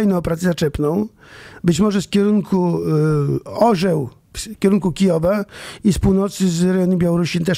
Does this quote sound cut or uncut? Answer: uncut